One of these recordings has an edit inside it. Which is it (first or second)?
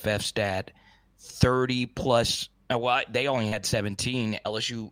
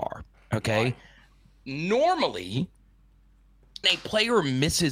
second